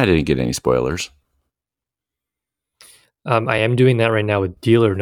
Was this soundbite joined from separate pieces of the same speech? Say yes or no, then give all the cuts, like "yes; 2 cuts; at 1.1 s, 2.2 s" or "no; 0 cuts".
no; 0 cuts